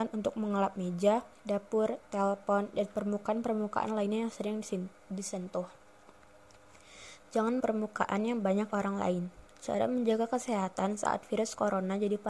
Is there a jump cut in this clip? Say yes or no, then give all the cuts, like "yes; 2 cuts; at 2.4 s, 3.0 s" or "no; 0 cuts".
yes; 3 cuts; at 1.4 s, 7.6 s, 8.7 s